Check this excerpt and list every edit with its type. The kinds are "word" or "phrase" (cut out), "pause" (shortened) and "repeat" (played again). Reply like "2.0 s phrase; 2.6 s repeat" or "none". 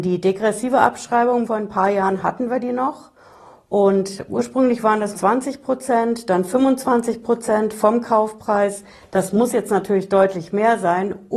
1.5 s word; 5.1 s word